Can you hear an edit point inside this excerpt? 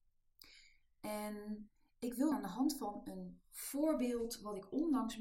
yes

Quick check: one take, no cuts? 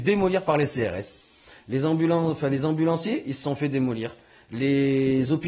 yes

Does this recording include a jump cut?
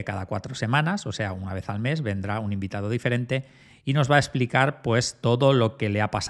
no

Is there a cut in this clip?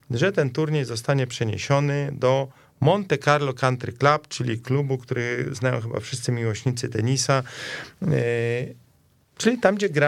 no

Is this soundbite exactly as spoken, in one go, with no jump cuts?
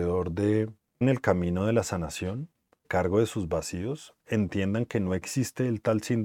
no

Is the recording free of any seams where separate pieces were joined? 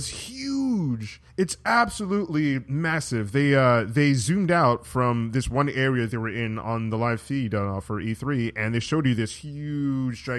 no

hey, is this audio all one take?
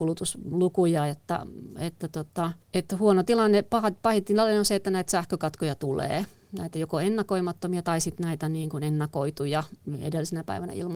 no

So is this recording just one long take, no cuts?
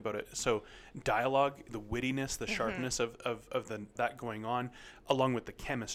no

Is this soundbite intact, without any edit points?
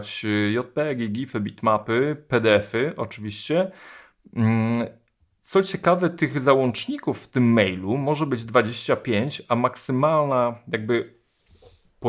yes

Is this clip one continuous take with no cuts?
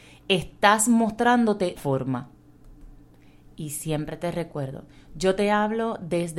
no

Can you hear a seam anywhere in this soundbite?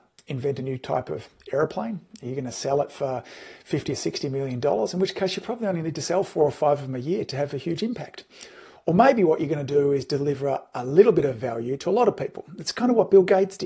no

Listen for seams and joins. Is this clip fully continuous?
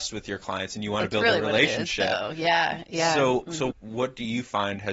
no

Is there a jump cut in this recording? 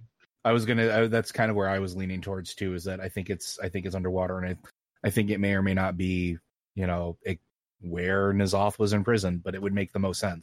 no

